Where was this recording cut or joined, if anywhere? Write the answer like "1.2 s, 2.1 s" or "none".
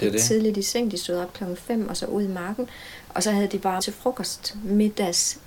3.8 s